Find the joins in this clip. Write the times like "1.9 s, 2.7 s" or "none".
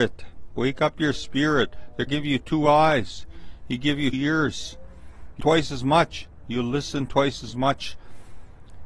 2.1 s, 4.1 s, 5.4 s